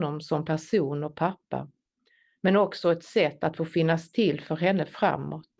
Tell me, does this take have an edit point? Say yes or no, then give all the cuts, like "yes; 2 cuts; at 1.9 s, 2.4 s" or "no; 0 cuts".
no; 0 cuts